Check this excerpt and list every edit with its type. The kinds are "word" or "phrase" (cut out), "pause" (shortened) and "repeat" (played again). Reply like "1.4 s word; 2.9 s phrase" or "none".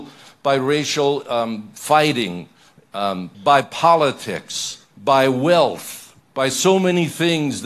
3.3 s pause; 4.9 s pause; 6.2 s pause